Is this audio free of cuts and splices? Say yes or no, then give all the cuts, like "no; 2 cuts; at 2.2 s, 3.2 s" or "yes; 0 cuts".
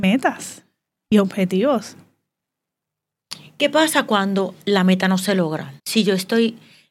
no; 1 cut; at 5.8 s